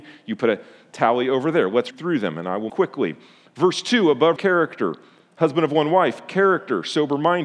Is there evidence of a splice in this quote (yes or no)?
yes